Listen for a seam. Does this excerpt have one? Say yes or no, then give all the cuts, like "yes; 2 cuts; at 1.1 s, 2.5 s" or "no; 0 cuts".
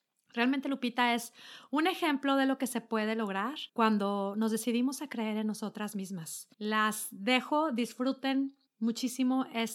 yes; 3 cuts; at 3.7 s, 6.5 s, 8.7 s